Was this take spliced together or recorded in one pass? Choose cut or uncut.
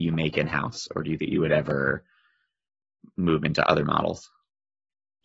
cut